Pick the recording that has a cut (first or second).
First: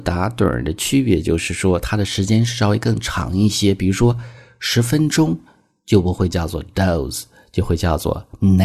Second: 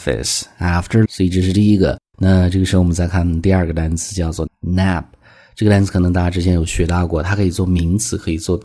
second